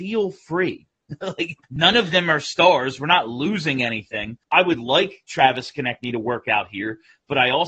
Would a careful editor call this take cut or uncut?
cut